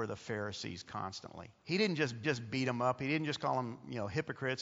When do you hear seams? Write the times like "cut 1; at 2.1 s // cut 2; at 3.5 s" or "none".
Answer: cut 1; at 1.6 s // cut 2; at 2.2 s